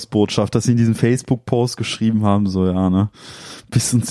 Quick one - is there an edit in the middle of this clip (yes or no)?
no